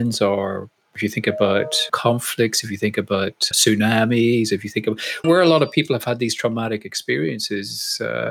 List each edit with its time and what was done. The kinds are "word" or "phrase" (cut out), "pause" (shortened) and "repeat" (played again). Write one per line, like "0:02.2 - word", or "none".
0:01.9 - word
0:03.5 - word
0:05.2 - word